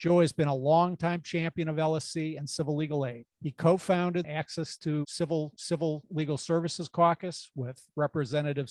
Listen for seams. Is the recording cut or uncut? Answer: cut